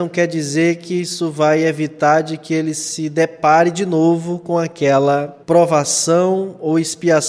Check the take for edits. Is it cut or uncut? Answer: cut